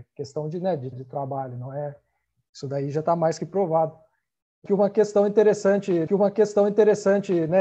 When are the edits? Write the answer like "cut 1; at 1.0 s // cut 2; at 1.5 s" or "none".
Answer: cut 1; at 0.9 s // cut 2; at 4.7 s // cut 3; at 6.1 s